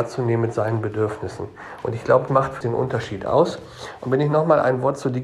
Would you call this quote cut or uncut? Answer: cut